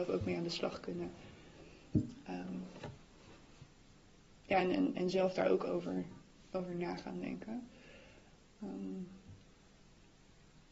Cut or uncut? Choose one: uncut